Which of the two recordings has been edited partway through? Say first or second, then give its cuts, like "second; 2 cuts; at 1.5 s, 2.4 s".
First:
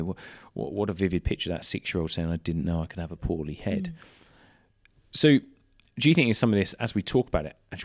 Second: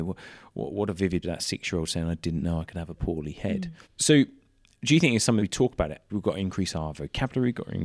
second; 4 cuts; at 1.2 s, 3.8 s, 5.4 s, 6.1 s